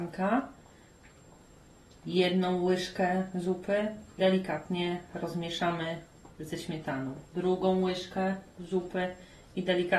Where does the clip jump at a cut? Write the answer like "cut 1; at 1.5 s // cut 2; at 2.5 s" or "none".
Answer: cut 1; at 4.2 s